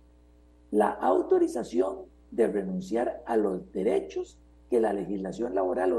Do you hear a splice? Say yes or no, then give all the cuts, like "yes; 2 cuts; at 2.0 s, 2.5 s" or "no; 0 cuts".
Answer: no; 0 cuts